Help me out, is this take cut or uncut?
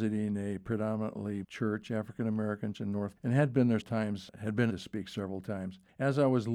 cut